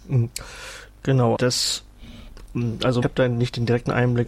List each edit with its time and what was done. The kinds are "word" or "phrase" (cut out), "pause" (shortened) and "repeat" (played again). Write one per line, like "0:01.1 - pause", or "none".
0:01.4 - word
0:03.0 - word

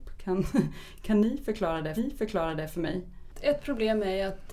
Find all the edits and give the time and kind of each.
0:02.0 - repeat

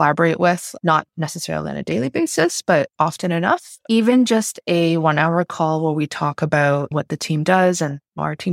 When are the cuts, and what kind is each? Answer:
none

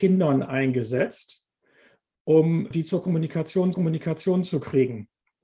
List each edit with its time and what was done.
0:02.7 - word
0:03.7 - repeat

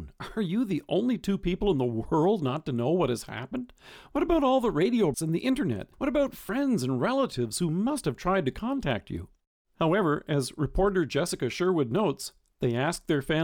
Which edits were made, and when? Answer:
0:05.1 - word
0:05.9 - pause

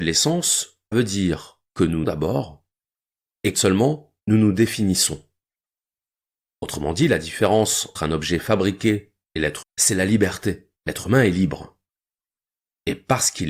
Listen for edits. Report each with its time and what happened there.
0:00.9 - word
0:01.7 - pause
0:02.0 - word
0:03.5 - word
0:04.2 - pause
0:08.0 - word
0:09.6 - word
0:10.8 - pause

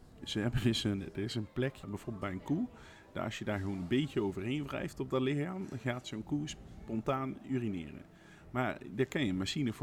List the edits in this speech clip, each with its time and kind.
0:01.8 - word

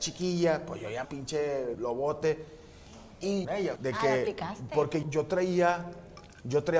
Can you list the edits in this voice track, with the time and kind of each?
0:01.0 - word
0:01.7 - word
0:03.4 - phrase
0:03.8 - word
0:05.0 - word

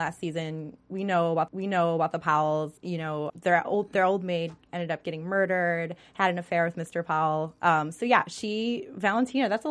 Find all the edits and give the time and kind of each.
0:01.5 - repeat
0:02.8 - pause
0:03.3 - word

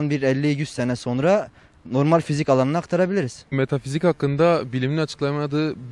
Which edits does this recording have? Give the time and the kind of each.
none

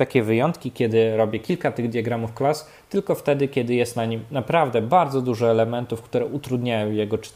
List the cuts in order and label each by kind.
none

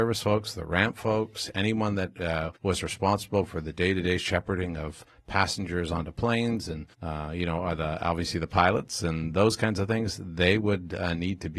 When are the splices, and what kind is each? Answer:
0:02.6 - pause
0:06.9 - pause

